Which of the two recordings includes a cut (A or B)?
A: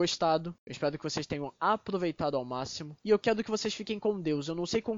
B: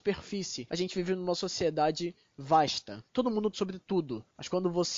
B